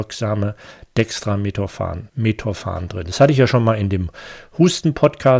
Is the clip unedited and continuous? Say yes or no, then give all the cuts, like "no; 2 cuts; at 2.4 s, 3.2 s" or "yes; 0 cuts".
no; 1 cut; at 2.1 s